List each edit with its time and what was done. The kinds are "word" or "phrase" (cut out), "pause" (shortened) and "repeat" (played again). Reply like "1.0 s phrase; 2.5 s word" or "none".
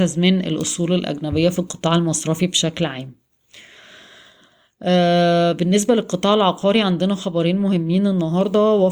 none